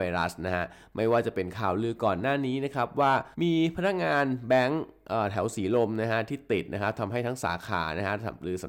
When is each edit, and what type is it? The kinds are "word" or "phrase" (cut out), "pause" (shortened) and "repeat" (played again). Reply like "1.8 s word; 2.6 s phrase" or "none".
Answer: 3.3 s pause